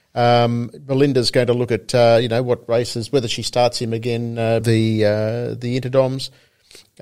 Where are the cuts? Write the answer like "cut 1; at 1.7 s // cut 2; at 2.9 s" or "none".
cut 1; at 4.6 s